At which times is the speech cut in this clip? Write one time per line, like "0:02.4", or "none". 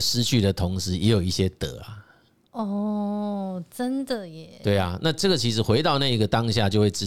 none